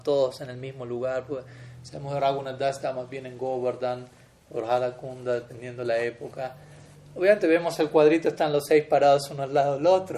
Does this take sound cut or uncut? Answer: uncut